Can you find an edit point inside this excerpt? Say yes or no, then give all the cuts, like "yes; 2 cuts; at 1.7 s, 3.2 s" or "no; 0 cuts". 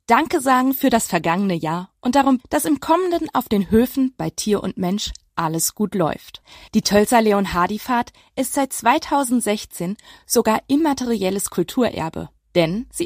yes; 1 cut; at 2.4 s